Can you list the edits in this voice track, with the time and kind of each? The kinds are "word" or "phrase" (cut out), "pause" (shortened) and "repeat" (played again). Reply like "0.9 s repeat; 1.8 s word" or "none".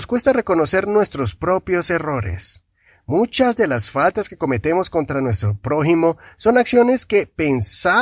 none